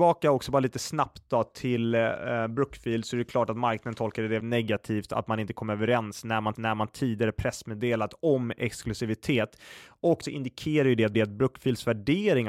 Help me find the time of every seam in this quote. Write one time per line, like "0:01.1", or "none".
0:04.4
0:06.6
0:10.2
0:11.1